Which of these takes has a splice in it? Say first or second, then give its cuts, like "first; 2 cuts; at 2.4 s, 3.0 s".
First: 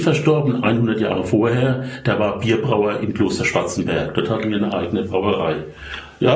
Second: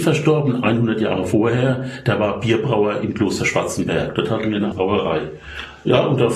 second; 1 cut; at 4.7 s